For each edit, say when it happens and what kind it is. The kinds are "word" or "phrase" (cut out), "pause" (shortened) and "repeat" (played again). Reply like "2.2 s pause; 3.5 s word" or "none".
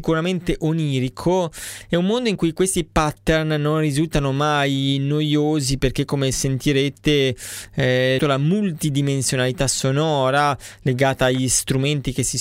8.2 s phrase

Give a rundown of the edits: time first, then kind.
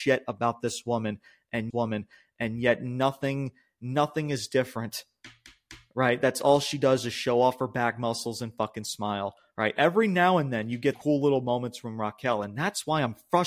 1.7 s repeat; 10.9 s word

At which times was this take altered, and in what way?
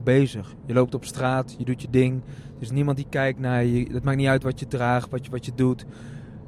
none

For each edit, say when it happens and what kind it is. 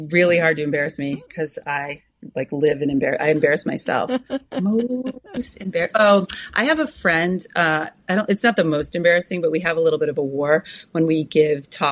none

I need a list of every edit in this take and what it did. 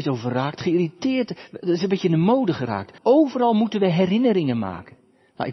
3.0 s pause

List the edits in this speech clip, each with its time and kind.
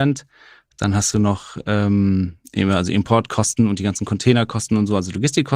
none

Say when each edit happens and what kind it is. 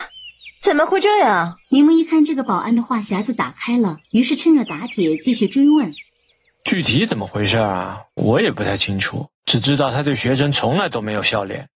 1.6 s pause; 4.0 s pause; 6.1 s pause; 9.3 s pause

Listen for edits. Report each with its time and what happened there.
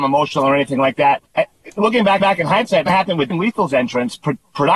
1.3 s pause; 2.2 s repeat; 2.9 s phrase; 3.3 s phrase

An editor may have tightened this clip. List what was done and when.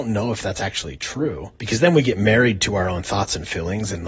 1.6 s pause

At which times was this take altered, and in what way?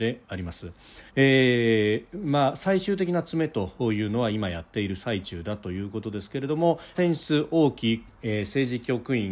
1.1 s pause; 6.9 s phrase

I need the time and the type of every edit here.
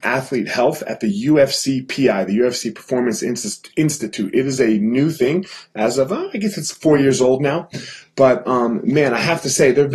none

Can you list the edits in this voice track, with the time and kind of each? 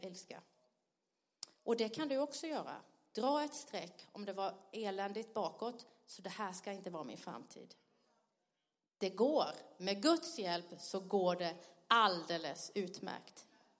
none

